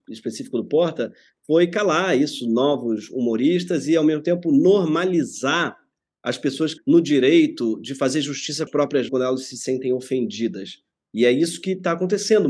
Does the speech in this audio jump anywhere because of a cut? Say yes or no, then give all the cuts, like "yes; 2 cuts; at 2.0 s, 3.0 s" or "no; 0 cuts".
yes; 3 cuts; at 6.8 s, 8.7 s, 9.1 s